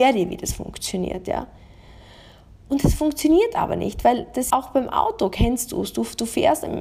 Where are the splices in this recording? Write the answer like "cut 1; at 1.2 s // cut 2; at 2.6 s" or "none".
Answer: cut 1; at 4.5 s